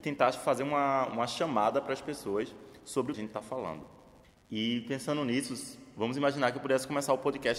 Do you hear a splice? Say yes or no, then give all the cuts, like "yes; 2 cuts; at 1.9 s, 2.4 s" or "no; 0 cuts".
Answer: yes; 3 cuts; at 1.1 s, 3.1 s, 4.2 s